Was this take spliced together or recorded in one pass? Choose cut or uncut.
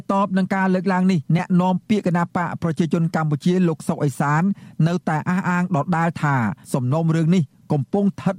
cut